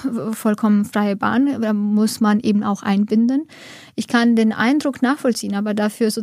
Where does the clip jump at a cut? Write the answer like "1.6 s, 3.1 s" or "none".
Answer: none

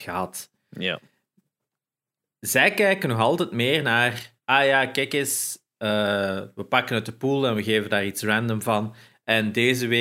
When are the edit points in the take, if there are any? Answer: 4.4 s

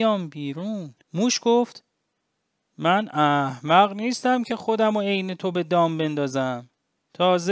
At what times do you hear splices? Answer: 1.0 s

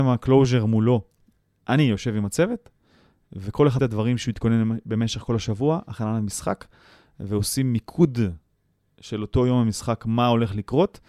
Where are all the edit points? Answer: 3.8 s

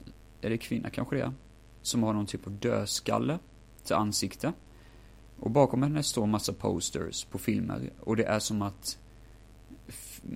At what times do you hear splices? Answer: none

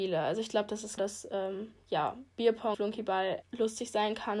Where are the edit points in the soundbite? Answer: 1.0 s, 2.7 s, 3.4 s

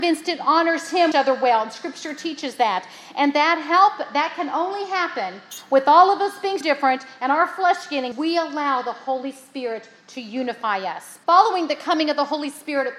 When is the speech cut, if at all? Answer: 1.1 s, 6.6 s, 8.1 s, 11.2 s

